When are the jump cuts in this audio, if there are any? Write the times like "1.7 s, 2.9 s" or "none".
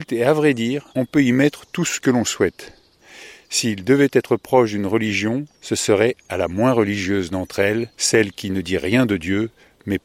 0.9 s, 5.5 s, 7.9 s